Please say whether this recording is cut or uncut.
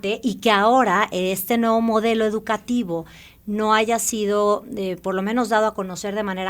uncut